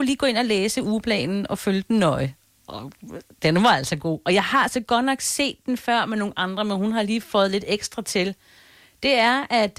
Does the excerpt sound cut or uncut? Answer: uncut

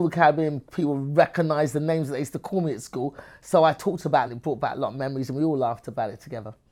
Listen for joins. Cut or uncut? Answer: cut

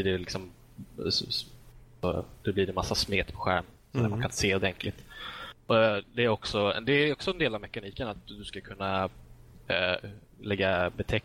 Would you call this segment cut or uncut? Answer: uncut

